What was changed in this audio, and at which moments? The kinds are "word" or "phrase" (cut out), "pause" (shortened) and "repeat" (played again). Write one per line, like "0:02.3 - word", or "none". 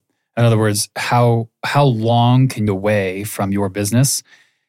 0:02.7 - phrase